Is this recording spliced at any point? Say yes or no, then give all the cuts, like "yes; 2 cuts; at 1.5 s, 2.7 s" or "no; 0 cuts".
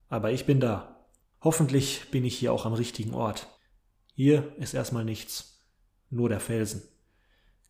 no; 0 cuts